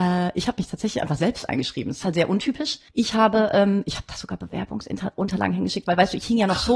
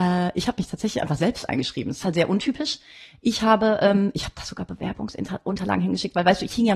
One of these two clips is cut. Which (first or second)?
first